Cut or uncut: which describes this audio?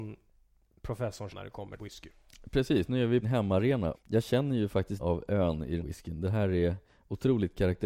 cut